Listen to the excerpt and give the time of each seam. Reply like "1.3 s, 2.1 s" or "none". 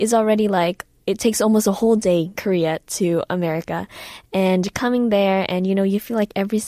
2.4 s

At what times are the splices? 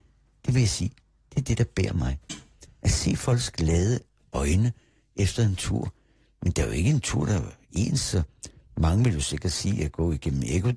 none

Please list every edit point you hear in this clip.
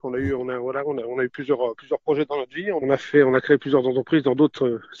2.8 s

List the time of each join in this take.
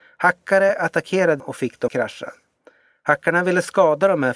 1.4 s, 1.9 s

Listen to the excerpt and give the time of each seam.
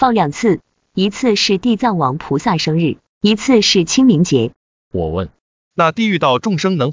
none

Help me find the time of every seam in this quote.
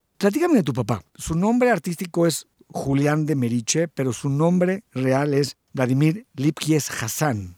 1.1 s

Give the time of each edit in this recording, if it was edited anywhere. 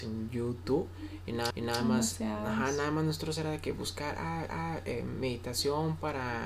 1.5 s, 4.5 s

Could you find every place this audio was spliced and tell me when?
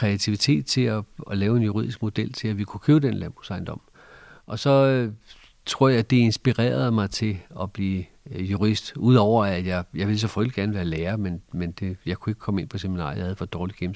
8.1 s

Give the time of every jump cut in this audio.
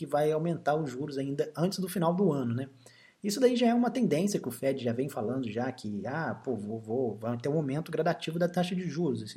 none

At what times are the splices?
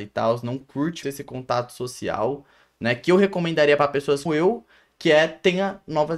1.0 s, 4.3 s

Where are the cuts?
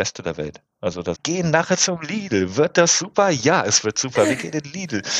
1.2 s

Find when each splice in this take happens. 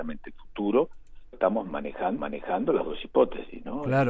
1.3 s, 2.2 s

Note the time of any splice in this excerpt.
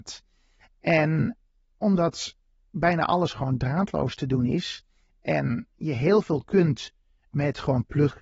none

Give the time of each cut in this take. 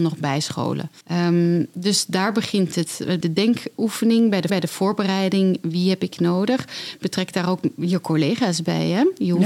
1.0 s, 3.2 s, 4.5 s

